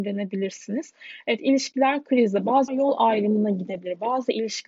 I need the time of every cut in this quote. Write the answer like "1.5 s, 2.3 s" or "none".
2.7 s